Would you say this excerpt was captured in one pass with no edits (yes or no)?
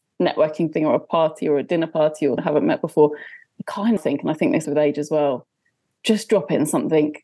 no